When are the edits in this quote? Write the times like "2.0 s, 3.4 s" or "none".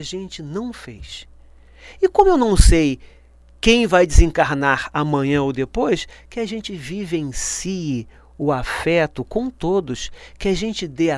none